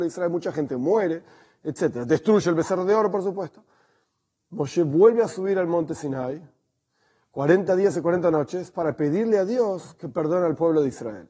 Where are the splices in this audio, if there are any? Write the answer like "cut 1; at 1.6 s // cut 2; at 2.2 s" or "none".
none